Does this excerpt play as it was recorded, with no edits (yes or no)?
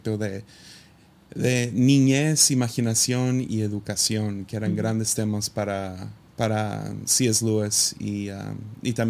no